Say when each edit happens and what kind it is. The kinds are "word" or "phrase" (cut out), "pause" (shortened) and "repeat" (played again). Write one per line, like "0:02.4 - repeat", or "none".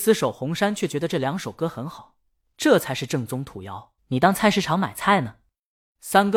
0:02.5 - phrase
0:04.0 - pause